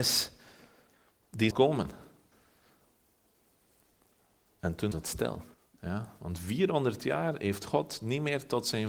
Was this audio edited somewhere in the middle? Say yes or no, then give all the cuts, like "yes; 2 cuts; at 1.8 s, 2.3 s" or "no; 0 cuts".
yes; 3 cuts; at 1.5 s, 4.9 s, 5.5 s